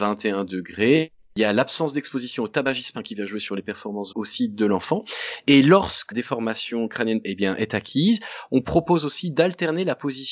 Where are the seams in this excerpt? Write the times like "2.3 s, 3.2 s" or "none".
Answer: 2.9 s, 4.1 s, 6.1 s, 7.2 s